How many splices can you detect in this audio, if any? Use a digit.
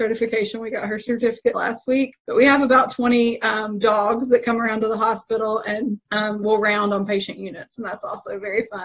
3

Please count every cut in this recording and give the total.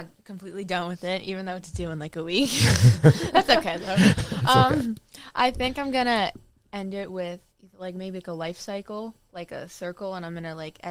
1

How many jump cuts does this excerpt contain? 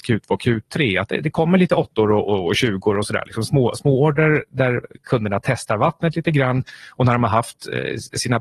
0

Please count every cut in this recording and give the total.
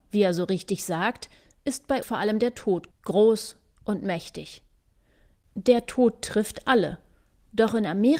2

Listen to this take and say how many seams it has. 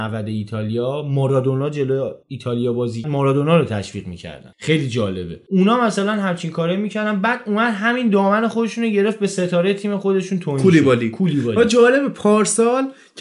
2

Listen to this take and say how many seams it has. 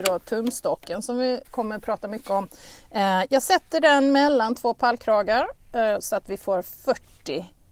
1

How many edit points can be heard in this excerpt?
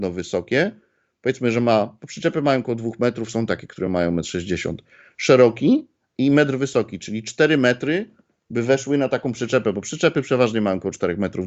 0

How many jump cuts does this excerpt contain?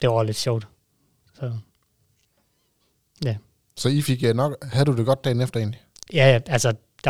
0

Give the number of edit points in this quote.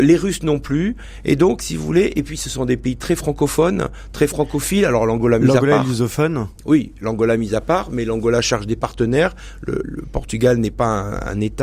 1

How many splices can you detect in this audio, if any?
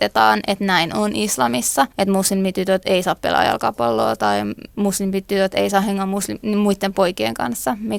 1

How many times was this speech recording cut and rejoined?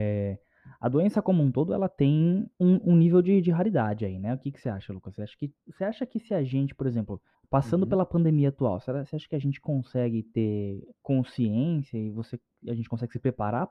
4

